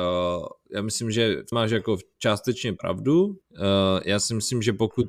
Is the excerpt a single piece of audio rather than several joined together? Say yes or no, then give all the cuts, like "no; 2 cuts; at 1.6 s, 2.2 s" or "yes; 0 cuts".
no; 2 cuts; at 1.5 s, 3.4 s